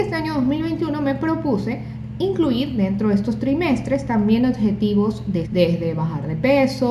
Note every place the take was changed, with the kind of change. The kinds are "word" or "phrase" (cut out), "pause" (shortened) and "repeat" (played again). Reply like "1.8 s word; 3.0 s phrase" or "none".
5.4 s word